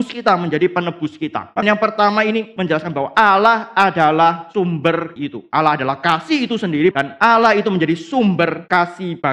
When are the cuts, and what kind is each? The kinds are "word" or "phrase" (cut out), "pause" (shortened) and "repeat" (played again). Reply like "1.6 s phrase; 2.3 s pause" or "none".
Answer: 1.6 s word; 5.2 s word; 6.9 s word